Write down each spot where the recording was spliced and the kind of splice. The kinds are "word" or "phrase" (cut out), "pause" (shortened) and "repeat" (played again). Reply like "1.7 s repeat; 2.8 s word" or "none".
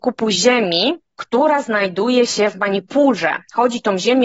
1.0 s pause

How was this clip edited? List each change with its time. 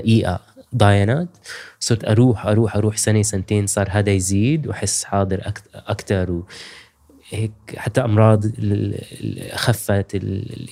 none

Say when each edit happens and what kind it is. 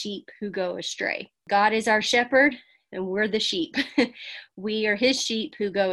none

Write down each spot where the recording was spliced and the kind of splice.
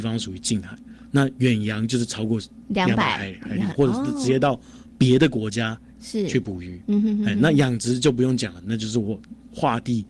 none

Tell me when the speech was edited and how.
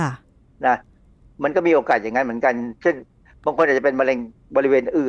none

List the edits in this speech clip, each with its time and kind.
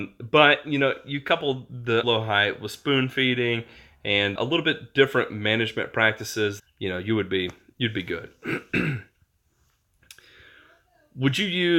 2.0 s word; 4.4 s word; 6.6 s word

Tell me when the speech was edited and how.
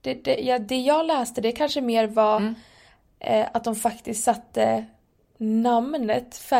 none

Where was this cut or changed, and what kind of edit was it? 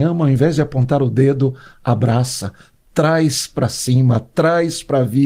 none

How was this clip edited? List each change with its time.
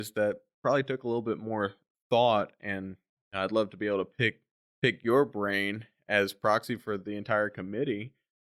none

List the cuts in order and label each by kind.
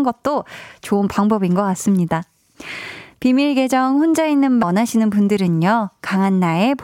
4.6 s phrase

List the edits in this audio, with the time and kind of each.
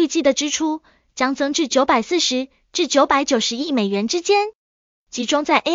none

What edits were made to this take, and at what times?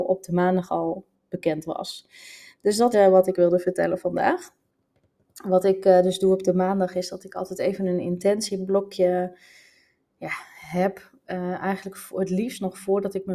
2.9 s word

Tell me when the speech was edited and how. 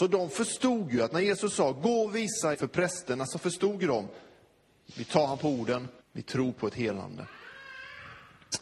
2.5 s word; 4.9 s word; 6.0 s pause

